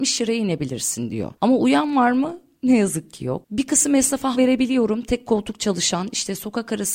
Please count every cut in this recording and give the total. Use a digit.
1